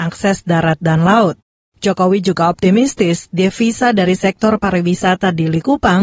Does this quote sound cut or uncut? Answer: uncut